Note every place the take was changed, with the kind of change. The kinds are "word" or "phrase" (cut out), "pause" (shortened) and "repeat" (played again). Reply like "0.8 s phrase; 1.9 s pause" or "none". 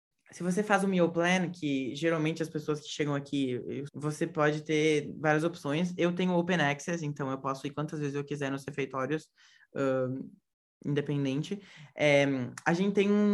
3.9 s phrase